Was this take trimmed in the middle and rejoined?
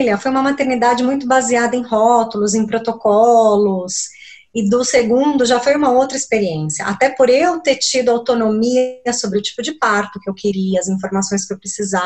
no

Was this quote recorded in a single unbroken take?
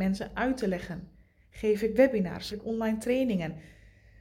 no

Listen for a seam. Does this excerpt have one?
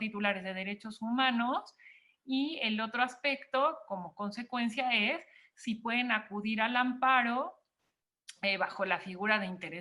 no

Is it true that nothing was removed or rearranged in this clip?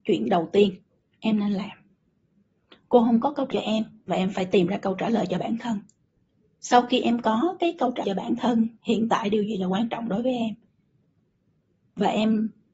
no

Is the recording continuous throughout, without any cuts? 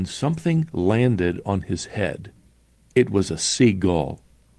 yes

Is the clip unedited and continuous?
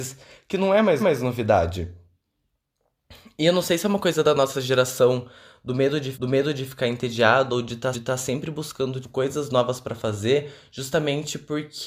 no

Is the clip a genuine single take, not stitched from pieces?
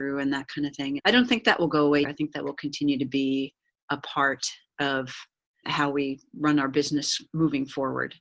no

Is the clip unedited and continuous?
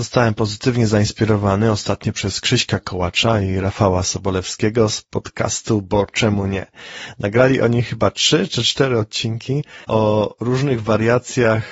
no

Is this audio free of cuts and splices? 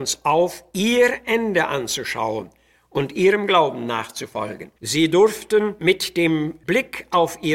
no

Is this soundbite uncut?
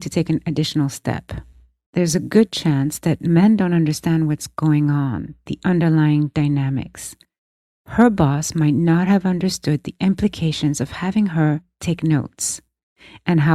yes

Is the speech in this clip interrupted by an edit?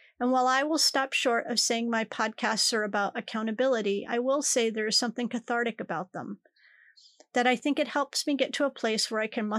no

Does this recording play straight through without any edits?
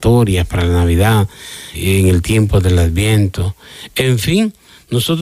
no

